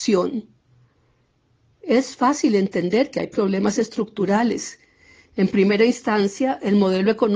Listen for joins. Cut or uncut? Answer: uncut